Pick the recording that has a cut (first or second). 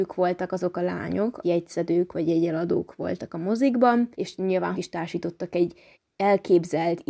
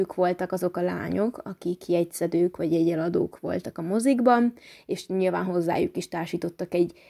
first